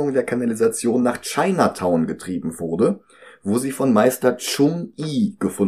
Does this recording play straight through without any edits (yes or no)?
yes